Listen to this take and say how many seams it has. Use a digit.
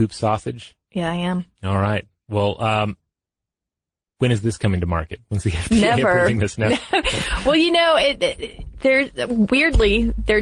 0